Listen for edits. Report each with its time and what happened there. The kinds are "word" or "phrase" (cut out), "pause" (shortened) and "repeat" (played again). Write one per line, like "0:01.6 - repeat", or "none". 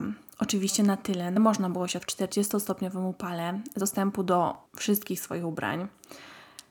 0:01.4 - word
0:02.0 - word
0:03.8 - word
0:04.7 - pause